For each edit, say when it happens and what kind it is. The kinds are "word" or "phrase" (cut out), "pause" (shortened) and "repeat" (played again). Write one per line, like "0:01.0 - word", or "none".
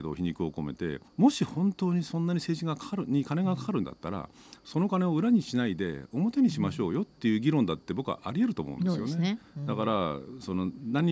0:01.1 - pause

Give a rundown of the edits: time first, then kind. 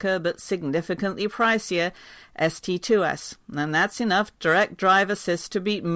none

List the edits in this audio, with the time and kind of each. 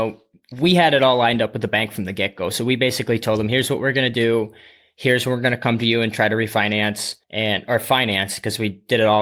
0:07.2 - pause

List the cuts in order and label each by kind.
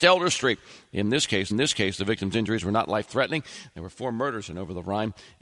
0:01.5 - repeat

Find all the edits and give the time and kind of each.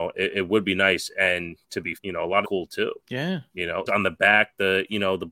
0:01.6 - pause
0:02.0 - word
0:02.4 - phrase
0:03.0 - pause
0:03.9 - word

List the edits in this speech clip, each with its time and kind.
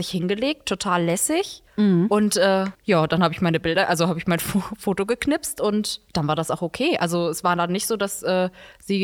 0:01.7 - pause
0:02.7 - pause
0:06.1 - pause

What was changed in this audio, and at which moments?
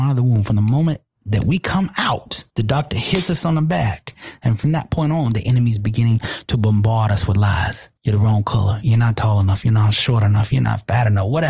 0:02.5 - pause
0:08.0 - pause

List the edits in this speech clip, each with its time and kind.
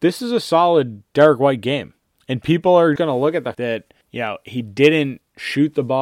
0:02.2 - pause
0:03.0 - word
0:03.5 - word
0:04.0 - pause

